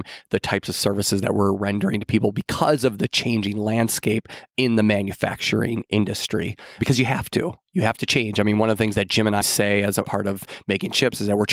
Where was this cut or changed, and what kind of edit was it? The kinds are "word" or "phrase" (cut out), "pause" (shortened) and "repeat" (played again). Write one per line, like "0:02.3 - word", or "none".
0:09.4 - word